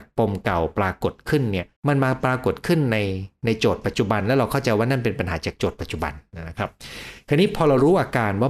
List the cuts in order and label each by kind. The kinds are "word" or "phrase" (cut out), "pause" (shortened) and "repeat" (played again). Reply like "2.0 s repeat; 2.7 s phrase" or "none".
1.8 s pause